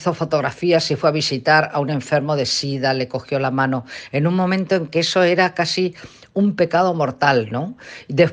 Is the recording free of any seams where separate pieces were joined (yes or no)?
yes